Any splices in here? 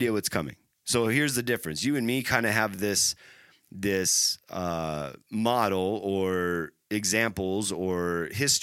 no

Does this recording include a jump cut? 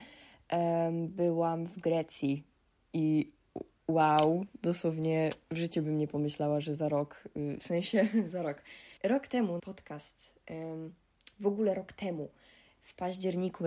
yes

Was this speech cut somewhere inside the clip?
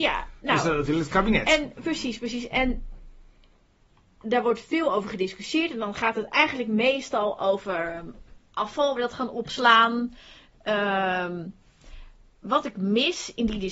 yes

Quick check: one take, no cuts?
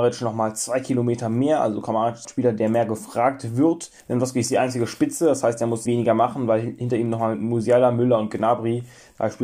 no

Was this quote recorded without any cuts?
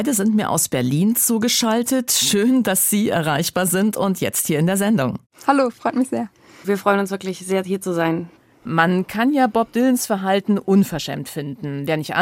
yes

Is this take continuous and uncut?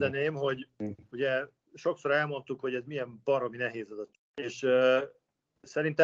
yes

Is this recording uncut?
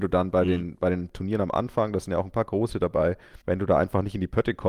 no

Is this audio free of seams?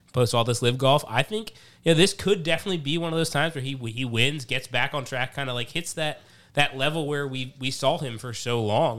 yes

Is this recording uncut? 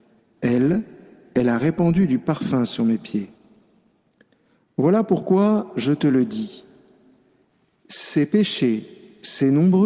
yes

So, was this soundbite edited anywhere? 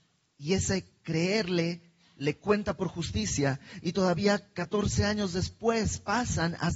no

